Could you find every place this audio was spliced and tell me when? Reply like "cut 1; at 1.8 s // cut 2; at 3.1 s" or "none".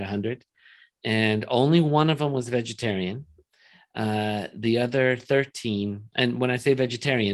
none

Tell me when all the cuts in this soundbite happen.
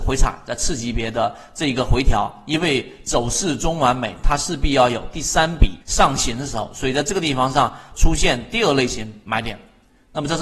cut 1; at 5.8 s

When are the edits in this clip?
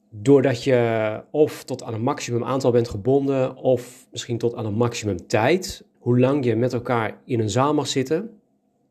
cut 1; at 5.9 s

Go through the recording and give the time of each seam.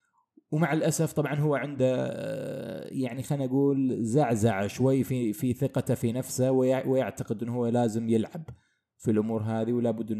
none

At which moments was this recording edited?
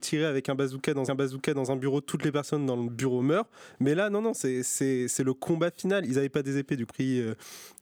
cut 1; at 1.1 s // cut 2; at 6.9 s

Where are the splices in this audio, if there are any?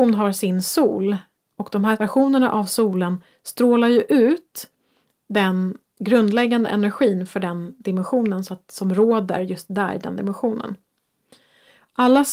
none

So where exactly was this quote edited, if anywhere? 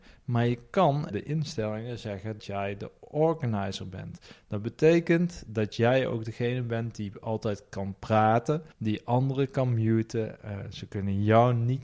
cut 1; at 1.1 s // cut 2; at 2.4 s // cut 3; at 8.7 s

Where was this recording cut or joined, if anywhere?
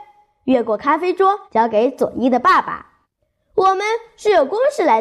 cut 1; at 1.4 s // cut 2; at 3.0 s

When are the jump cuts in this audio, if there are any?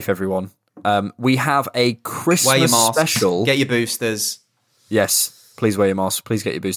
none

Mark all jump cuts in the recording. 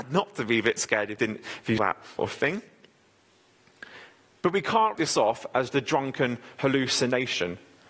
cut 1; at 1.2 s // cut 2; at 1.8 s // cut 3; at 2.2 s // cut 4; at 4.9 s // cut 5; at 5.7 s

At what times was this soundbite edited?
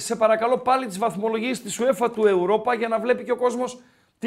none

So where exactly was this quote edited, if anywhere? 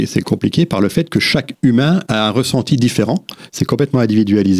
none

